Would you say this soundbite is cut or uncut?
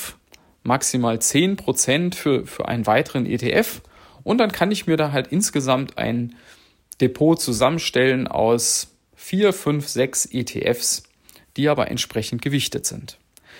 uncut